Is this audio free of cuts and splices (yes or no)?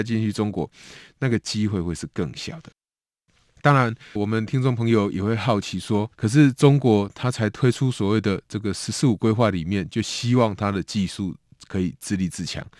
no